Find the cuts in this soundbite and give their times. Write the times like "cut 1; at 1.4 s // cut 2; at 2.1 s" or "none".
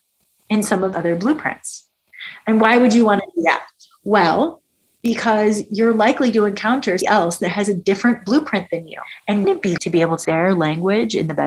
cut 1; at 0.9 s // cut 2; at 7.0 s // cut 3; at 9.4 s // cut 4; at 9.8 s // cut 5; at 10.2 s